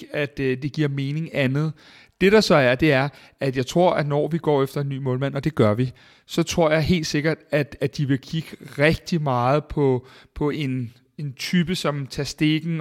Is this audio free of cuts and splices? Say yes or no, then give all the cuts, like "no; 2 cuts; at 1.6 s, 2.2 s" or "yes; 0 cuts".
yes; 0 cuts